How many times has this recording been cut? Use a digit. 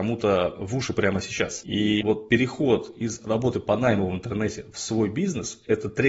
0